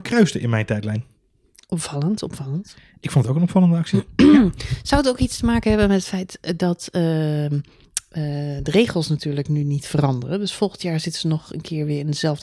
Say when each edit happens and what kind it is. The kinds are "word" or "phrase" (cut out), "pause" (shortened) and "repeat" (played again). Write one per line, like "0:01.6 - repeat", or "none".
none